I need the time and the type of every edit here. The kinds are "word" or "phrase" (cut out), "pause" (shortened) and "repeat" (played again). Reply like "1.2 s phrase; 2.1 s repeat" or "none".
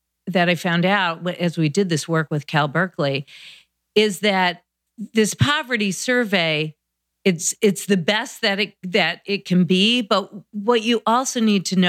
none